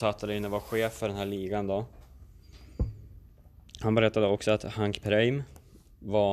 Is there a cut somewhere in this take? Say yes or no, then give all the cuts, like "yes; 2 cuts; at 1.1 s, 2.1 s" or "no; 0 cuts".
no; 0 cuts